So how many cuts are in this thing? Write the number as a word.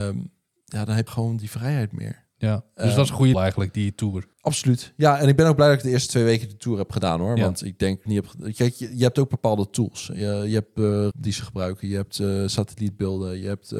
five